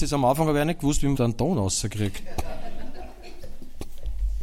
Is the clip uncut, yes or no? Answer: no